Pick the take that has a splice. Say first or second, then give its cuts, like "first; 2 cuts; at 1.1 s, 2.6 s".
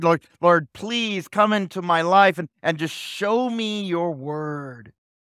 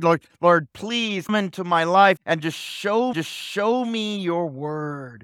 second; 3 cuts; at 1.3 s, 2.2 s, 3.1 s